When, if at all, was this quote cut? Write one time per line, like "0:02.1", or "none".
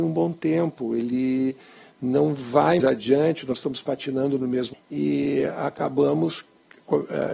0:02.8
0:04.7